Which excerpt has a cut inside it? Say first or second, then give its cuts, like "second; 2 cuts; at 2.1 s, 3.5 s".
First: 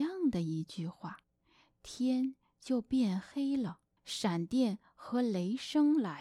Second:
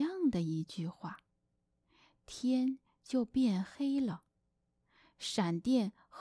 first; 2 cuts; at 1.2 s, 4.0 s